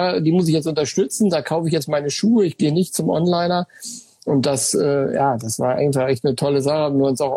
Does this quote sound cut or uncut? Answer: uncut